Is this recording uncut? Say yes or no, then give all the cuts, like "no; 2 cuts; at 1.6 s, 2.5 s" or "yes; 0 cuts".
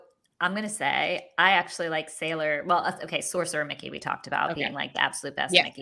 yes; 0 cuts